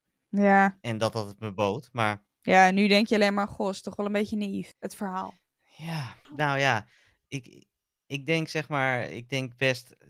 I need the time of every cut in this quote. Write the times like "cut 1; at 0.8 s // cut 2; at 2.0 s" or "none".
none